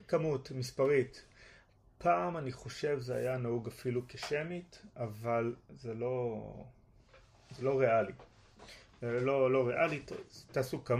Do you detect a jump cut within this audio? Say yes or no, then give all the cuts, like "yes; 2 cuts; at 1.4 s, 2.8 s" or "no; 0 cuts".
no; 0 cuts